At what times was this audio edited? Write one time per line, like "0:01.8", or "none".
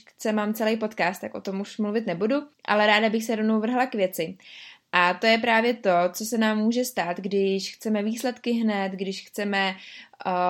0:02.5